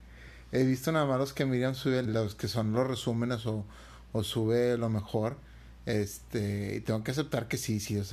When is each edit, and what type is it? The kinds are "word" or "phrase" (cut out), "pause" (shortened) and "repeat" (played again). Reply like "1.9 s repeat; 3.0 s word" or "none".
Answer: 2.1 s phrase